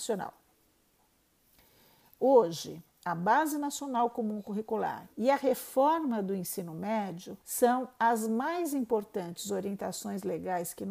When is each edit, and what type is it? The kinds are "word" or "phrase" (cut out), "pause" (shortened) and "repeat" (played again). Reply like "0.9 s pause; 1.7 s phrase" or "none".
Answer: 5.1 s pause; 7.4 s pause